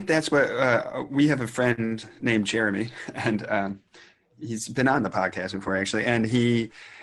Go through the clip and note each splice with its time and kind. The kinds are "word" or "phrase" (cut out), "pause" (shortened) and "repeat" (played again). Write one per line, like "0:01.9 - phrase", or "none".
none